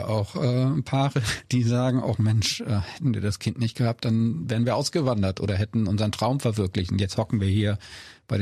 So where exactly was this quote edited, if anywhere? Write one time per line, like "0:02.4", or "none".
none